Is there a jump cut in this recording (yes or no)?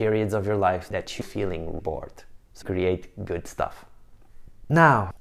yes